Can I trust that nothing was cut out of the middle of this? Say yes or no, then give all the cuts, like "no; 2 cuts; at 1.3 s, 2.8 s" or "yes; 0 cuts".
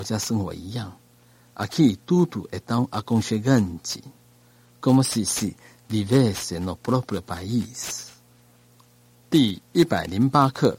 yes; 0 cuts